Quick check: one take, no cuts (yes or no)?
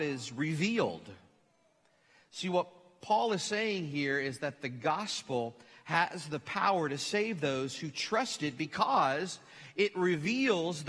yes